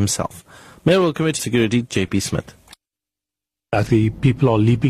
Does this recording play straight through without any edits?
no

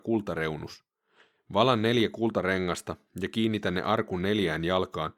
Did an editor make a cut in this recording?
no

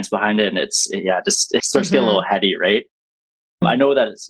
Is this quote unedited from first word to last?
no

